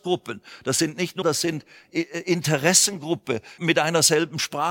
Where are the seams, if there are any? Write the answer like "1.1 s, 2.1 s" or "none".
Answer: 1.2 s, 3.6 s